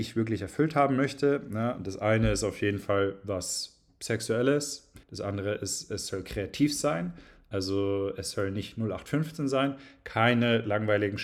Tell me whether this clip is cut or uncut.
cut